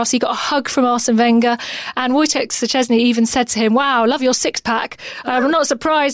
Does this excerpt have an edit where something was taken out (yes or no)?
no